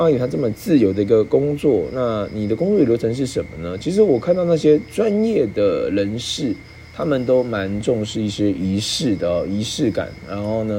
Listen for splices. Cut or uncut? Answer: uncut